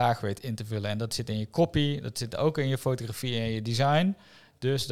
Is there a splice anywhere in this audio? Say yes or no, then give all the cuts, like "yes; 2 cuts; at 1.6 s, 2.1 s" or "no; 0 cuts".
no; 0 cuts